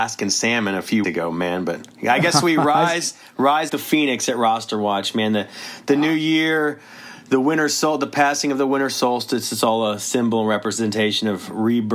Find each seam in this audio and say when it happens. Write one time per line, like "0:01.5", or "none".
0:01.0
0:03.7